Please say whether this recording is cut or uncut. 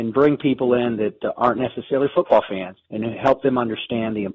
cut